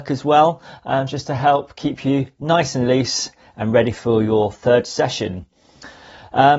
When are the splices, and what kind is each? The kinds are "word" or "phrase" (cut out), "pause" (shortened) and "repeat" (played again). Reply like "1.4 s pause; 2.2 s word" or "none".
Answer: none